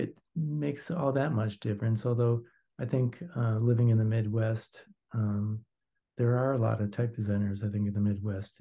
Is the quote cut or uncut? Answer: uncut